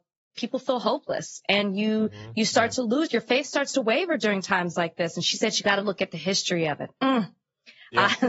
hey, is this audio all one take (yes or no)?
yes